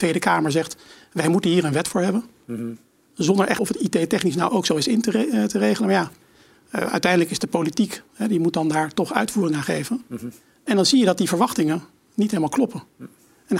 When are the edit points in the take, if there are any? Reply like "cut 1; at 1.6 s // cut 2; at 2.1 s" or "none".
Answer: cut 1; at 3.6 s // cut 2; at 4.5 s